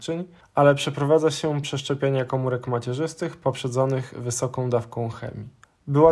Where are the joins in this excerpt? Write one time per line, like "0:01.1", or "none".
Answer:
0:01.6